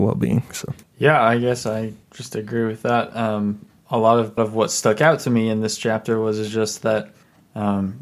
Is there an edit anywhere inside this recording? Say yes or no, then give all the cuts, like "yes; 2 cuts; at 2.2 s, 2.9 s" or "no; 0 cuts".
yes; 2 cuts; at 2.0 s, 4.4 s